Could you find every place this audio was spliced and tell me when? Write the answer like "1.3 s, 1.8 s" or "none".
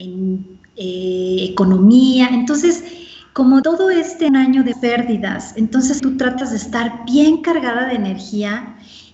3.6 s, 4.3 s, 4.7 s, 6.0 s